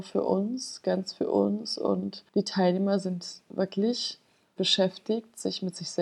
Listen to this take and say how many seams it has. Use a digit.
2